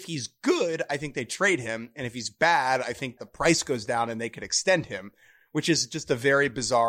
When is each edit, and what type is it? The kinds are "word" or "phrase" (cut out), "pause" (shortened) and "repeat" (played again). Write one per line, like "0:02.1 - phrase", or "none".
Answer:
0:03.2 - word